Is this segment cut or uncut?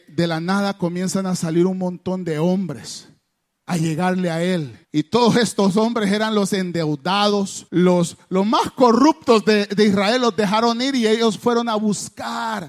cut